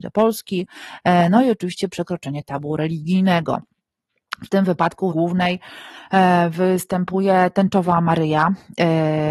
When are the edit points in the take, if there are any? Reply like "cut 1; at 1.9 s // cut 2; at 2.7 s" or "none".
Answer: cut 1; at 5.1 s